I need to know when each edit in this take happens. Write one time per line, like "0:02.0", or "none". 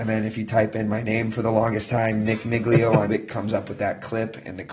0:03.1